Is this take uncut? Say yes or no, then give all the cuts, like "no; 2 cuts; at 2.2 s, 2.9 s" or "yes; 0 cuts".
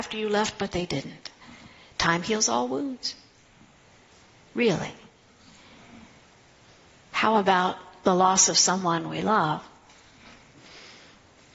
yes; 0 cuts